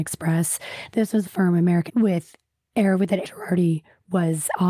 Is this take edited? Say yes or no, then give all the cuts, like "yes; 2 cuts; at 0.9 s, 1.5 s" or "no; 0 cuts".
yes; 3 cuts; at 1.3 s, 1.9 s, 3.2 s